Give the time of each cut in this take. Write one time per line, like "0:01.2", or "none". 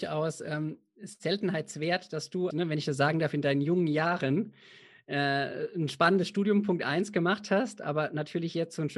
0:02.5